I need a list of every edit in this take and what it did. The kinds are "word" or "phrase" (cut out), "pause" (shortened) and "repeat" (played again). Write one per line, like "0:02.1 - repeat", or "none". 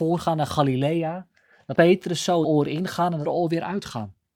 0:01.7 - word
0:02.4 - phrase
0:03.2 - word